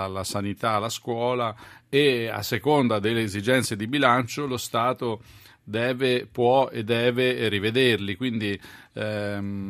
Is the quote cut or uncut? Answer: uncut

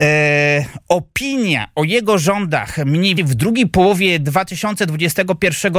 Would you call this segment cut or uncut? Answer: cut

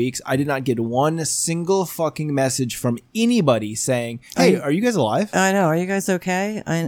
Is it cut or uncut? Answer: uncut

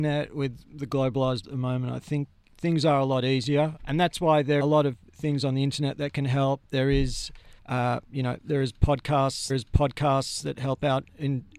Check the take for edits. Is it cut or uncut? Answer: cut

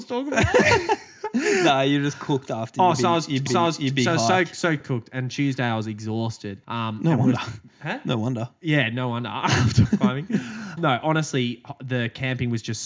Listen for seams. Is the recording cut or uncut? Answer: cut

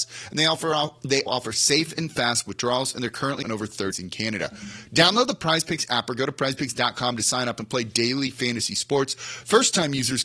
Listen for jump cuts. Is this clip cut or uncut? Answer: cut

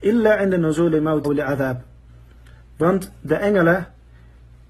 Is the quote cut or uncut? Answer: cut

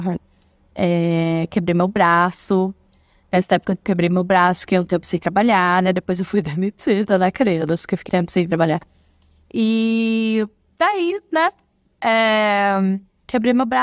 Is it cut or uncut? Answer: cut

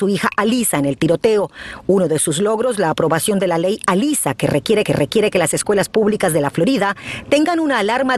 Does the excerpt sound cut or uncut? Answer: cut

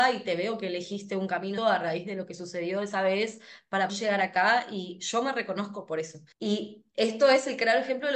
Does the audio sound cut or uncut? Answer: cut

